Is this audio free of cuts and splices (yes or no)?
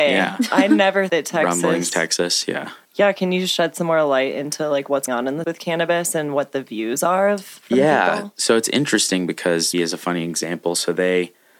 no